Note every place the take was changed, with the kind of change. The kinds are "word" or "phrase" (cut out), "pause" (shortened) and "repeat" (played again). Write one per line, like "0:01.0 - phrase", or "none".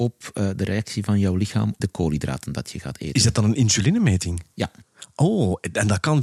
0:01.8 - word